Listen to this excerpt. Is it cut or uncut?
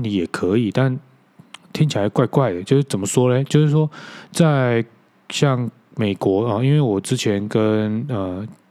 uncut